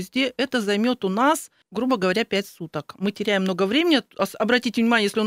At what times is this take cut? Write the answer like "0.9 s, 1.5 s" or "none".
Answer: 1.6 s

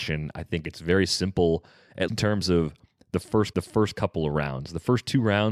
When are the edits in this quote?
2.1 s, 3.5 s

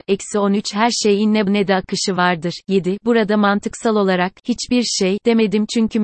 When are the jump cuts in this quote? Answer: 1.5 s

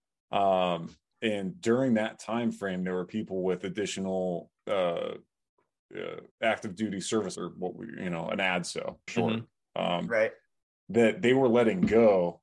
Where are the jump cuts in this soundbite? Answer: 4.6 s, 6.3 s, 7.3 s, 9.1 s

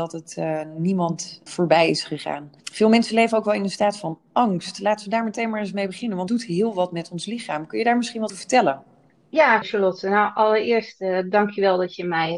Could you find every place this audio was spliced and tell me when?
1.5 s, 2.6 s, 6.3 s, 8.3 s, 9.6 s

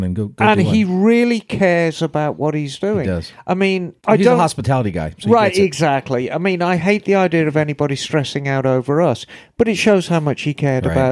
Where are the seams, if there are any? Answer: 4.0 s

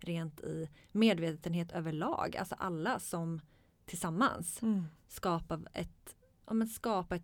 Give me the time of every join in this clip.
none

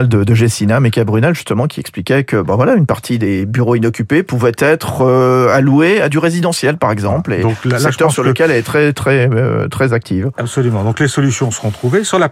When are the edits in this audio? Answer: none

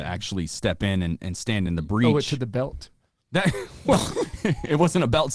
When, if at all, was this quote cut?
none

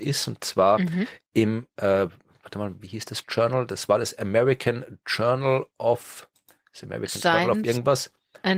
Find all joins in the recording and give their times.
none

